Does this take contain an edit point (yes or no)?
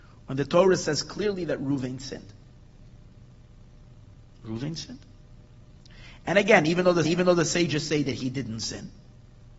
yes